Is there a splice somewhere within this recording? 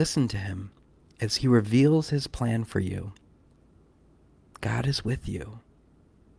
no; 0 cuts

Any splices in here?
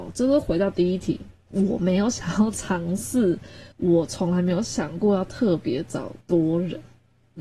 yes; 3 cuts; at 1.4 s, 3.7 s, 6.2 s

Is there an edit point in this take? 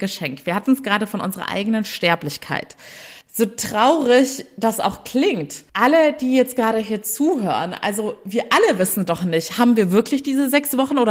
yes; 2 cuts; at 3.2 s, 5.7 s

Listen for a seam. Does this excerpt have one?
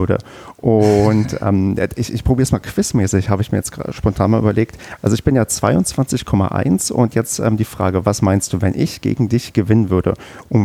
no; 0 cuts

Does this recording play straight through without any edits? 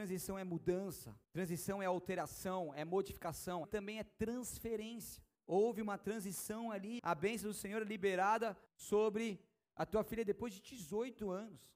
no; 5 cuts; at 1.2 s, 3.6 s, 5.4 s, 7.0 s, 8.7 s

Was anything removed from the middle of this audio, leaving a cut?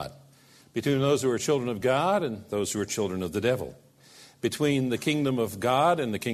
no; 0 cuts

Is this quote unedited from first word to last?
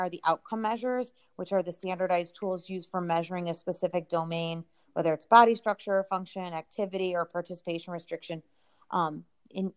yes; 0 cuts

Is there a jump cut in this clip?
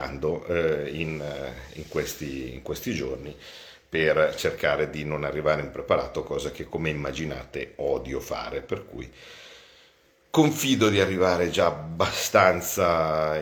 no; 0 cuts

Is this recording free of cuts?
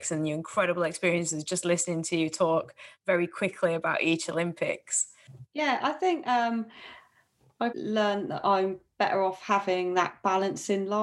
no; 1 cut; at 7.7 s

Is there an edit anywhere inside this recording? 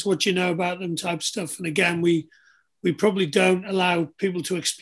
no; 0 cuts

